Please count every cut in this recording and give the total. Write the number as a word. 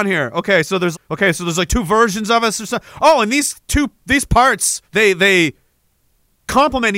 two